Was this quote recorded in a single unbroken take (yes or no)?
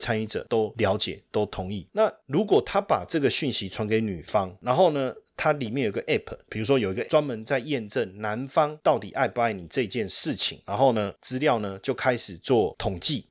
no